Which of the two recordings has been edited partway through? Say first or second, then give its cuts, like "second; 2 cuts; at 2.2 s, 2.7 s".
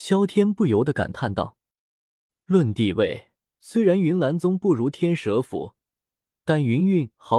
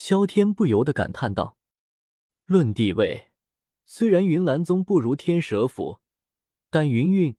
first; 1 cut; at 3.5 s